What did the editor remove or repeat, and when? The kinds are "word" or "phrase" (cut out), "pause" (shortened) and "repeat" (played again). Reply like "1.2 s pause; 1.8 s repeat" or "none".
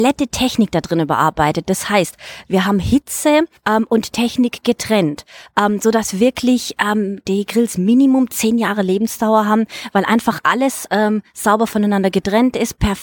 3.6 s pause